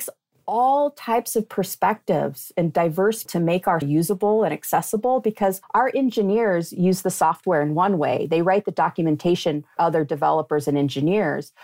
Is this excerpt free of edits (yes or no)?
no